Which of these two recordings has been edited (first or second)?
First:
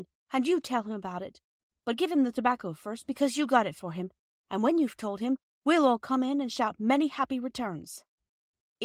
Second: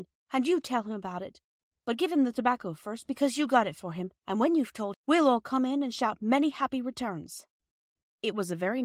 second